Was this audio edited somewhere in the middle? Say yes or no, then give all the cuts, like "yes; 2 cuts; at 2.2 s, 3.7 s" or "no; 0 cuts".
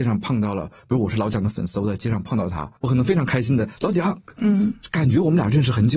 yes; 1 cut; at 2.8 s